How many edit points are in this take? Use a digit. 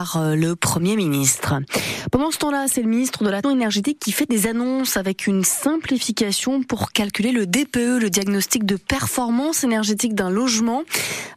1